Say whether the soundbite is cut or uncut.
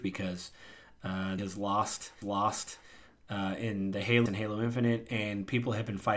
cut